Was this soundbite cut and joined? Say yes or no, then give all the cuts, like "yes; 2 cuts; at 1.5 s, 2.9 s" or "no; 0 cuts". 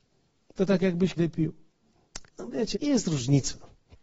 yes; 3 cuts; at 1.2 s, 2.3 s, 2.7 s